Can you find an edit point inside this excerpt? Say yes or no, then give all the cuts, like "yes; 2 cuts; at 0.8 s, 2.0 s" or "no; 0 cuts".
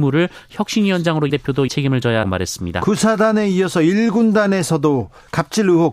yes; 3 cuts; at 1.3 s, 1.7 s, 2.2 s